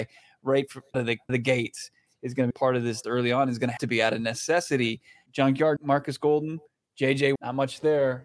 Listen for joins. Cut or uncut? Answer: cut